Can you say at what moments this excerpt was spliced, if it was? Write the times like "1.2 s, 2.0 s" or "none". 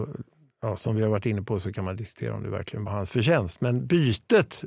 2.9 s